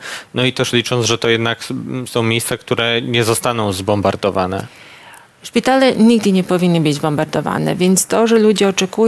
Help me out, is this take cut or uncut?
uncut